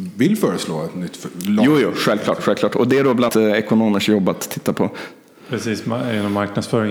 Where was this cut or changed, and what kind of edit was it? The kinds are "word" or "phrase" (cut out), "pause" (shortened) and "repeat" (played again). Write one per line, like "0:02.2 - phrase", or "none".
0:03.3 - word